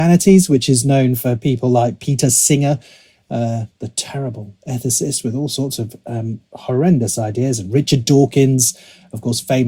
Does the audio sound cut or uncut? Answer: uncut